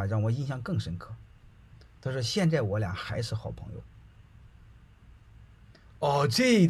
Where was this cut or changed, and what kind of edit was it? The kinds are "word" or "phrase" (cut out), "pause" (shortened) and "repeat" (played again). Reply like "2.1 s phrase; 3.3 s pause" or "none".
none